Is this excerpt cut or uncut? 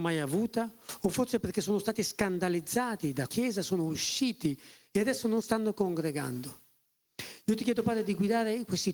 cut